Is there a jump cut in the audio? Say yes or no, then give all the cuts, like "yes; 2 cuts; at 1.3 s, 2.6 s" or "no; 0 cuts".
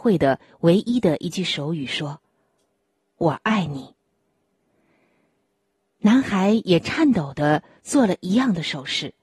no; 0 cuts